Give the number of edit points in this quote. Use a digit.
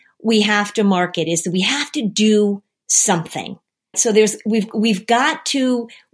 1